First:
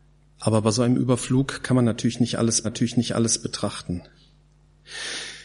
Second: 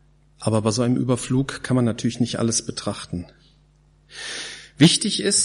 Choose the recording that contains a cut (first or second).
first